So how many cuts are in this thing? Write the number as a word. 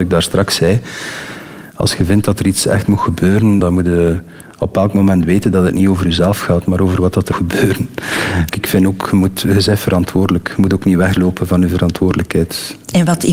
two